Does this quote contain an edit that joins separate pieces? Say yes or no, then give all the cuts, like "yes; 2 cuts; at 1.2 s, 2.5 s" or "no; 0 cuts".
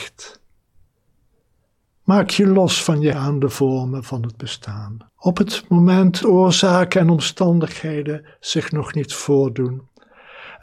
yes; 3 cuts; at 3.1 s, 5.1 s, 6.2 s